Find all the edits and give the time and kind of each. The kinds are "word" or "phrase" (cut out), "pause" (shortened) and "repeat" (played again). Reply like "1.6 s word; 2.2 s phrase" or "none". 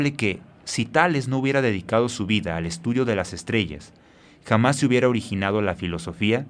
none